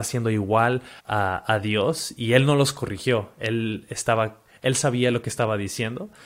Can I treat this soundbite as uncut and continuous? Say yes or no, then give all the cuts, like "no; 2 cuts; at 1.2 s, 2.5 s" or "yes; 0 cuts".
no; 1 cut; at 1.0 s